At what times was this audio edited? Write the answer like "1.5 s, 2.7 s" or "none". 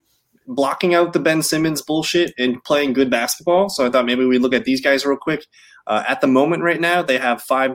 none